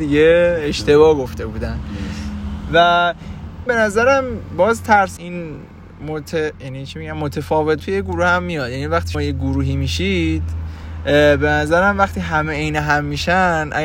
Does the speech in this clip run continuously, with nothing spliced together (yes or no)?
no